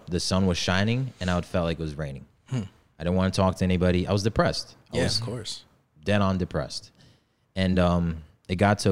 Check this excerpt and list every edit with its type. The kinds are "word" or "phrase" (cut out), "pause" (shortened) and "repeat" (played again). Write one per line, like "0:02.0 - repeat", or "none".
none